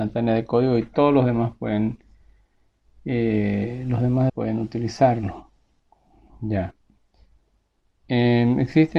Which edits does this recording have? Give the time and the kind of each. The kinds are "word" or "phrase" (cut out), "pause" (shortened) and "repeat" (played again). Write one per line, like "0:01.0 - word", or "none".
0:04.3 - word